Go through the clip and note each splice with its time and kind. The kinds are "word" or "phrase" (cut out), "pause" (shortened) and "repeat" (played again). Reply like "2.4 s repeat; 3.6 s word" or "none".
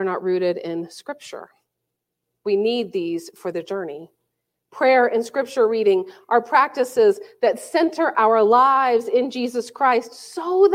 none